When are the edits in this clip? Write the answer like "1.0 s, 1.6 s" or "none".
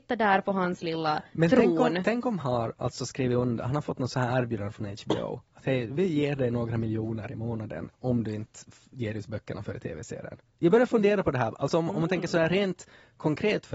2.4 s, 7.9 s, 10.5 s